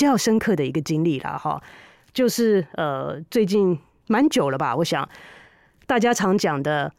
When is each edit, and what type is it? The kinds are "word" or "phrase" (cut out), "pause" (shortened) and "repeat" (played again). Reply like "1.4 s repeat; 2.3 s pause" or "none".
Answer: none